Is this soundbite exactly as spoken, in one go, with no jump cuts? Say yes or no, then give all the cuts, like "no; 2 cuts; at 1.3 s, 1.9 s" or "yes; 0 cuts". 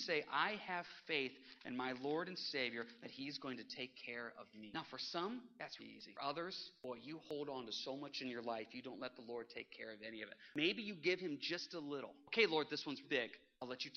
no; 2 cuts; at 5.8 s, 13.0 s